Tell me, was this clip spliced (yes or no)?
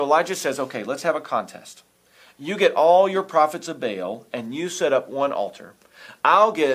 no